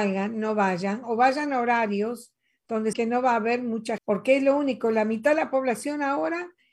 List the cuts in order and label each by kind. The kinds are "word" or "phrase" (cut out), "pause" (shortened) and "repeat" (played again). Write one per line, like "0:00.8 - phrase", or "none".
0:02.9 - word
0:04.0 - word

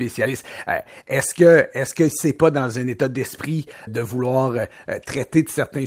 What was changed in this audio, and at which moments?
0:03.9 - word

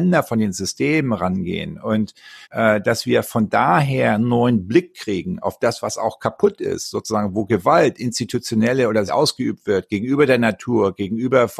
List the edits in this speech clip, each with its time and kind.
0:02.4 - pause
0:09.1 - phrase

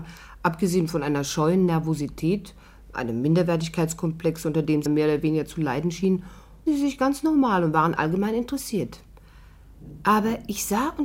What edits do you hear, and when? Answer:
0:04.9 - word
0:06.7 - word
0:08.0 - word

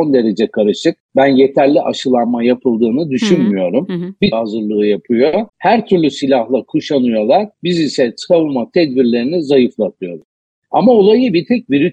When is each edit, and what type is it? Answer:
0:01.0 - pause
0:04.3 - phrase
0:05.5 - pause
0:07.5 - pause

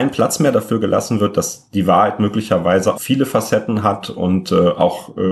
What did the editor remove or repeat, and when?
0:02.9 - word

